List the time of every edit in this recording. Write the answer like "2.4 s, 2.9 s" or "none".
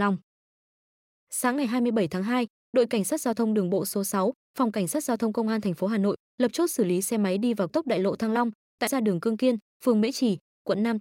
7.7 s, 8.9 s